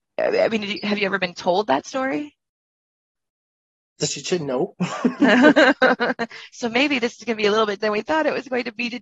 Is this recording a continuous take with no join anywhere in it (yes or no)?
no